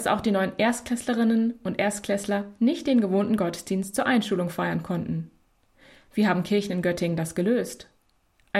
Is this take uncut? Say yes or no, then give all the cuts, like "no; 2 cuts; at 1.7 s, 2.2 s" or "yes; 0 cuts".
yes; 0 cuts